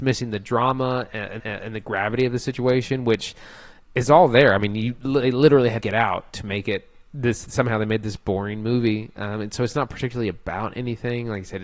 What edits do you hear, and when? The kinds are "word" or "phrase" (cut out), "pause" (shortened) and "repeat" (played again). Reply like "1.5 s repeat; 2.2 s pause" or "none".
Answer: 1.4 s repeat; 5.8 s phrase